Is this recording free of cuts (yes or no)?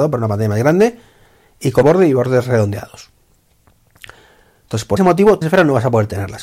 no